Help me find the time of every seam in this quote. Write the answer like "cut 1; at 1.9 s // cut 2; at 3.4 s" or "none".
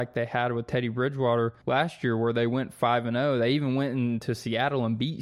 cut 1; at 1.6 s